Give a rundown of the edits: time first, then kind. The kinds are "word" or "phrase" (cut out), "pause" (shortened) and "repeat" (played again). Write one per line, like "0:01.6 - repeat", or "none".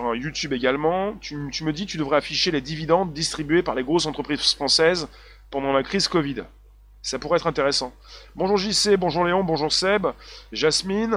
none

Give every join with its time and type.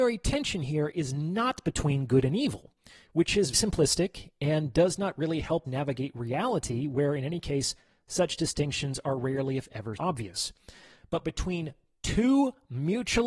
0:03.5 - word
0:05.7 - word
0:10.0 - word

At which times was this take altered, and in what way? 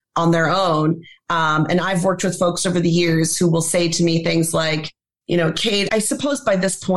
0:05.9 - word

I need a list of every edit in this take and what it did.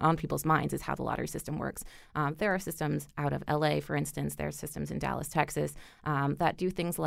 none

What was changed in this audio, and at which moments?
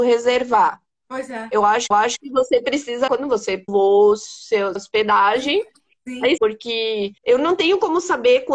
0:01.9 - repeat
0:03.1 - word
0:03.7 - phrase
0:04.8 - word
0:06.4 - phrase
0:07.2 - pause

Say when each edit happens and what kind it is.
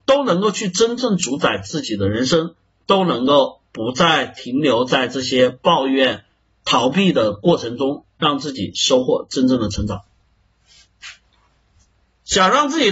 none

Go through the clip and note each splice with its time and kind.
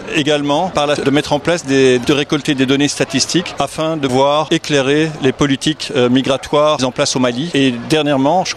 0:01.0 - word
0:02.0 - word
0:04.1 - word
0:06.8 - word

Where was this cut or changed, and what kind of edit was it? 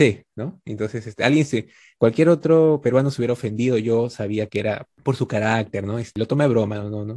none

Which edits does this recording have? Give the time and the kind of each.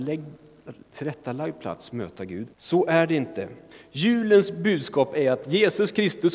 0:02.5 - pause

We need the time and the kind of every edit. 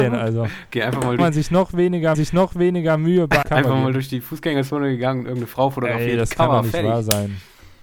0:01.2 - phrase
0:02.1 - repeat
0:03.4 - word

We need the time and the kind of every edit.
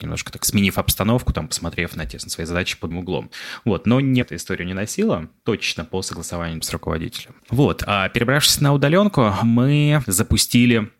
0:02.9 - word
0:04.2 - word
0:06.6 - word
0:07.4 - pause

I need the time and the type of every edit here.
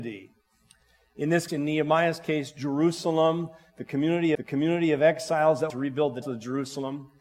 0:01.5 - word
0:04.3 - repeat
0:05.7 - phrase
0:06.2 - phrase

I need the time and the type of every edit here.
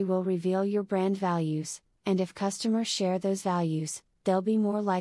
none

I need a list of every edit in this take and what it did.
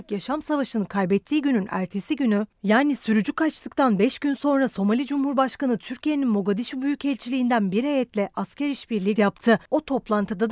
0:09.2 - word

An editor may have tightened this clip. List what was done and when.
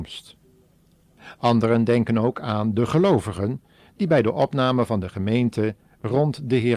none

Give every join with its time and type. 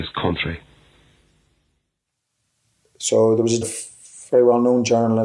0:03.6 - word

